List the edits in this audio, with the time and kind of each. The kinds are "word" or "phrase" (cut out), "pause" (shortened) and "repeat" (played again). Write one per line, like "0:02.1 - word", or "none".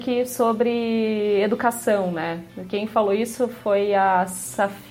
none